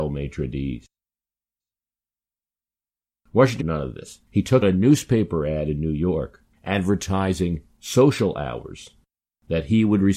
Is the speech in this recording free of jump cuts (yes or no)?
no